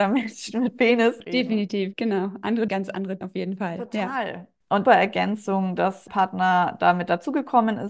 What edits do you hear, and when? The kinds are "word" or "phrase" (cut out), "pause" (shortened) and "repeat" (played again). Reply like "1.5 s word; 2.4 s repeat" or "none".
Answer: 1.2 s phrase; 2.7 s word; 3.2 s word; 4.8 s phrase; 6.1 s word